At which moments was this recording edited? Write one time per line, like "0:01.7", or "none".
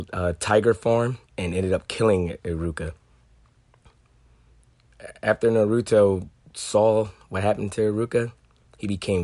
0:01.2